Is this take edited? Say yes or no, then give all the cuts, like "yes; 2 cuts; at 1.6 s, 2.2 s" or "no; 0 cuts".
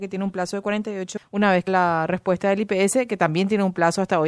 yes; 2 cuts; at 1.2 s, 1.7 s